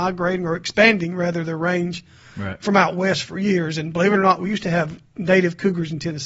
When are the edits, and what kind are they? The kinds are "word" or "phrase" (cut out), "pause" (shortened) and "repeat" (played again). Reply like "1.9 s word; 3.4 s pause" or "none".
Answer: none